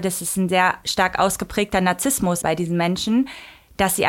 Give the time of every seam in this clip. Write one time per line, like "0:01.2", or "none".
0:02.4